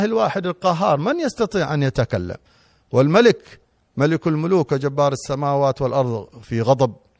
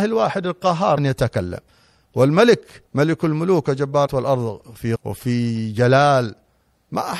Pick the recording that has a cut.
second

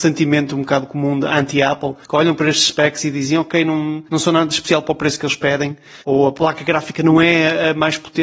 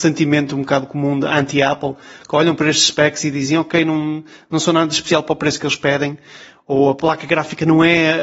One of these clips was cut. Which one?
first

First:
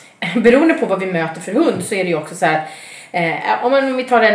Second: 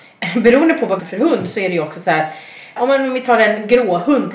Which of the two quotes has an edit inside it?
second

